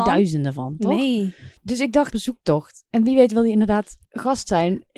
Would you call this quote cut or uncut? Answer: cut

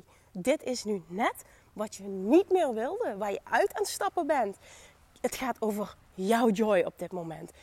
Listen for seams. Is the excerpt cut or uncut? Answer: uncut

